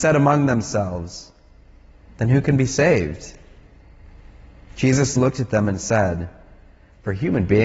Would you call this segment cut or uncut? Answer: uncut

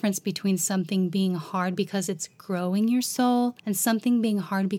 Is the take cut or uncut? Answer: cut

